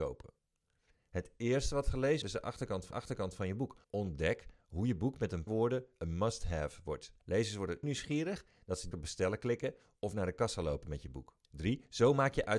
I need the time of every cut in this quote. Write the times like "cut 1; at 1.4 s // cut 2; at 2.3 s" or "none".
cut 1; at 2.2 s // cut 2; at 2.9 s // cut 3; at 3.8 s // cut 4; at 5.5 s // cut 5; at 7.2 s // cut 6; at 7.8 s // cut 7; at 8.9 s // cut 8; at 11.4 s